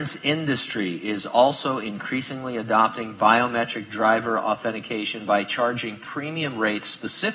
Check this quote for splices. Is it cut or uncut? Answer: uncut